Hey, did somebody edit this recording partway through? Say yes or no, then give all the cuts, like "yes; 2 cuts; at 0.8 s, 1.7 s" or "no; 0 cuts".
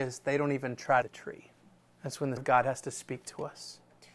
yes; 3 cuts; at 1.0 s, 1.8 s, 2.4 s